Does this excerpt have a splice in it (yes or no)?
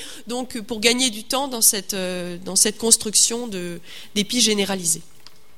no